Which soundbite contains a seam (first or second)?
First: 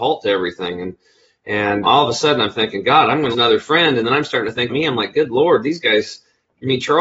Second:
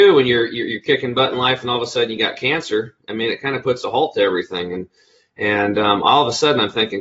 first